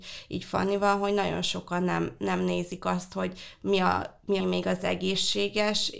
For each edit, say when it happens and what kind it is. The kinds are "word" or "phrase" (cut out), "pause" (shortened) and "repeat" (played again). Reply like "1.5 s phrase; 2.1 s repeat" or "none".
4.4 s phrase